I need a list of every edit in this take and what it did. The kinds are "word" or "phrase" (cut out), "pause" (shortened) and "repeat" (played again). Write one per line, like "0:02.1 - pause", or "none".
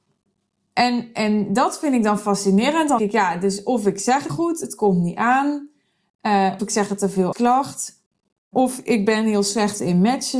0:03.0 - word
0:04.3 - word
0:06.6 - word
0:07.3 - word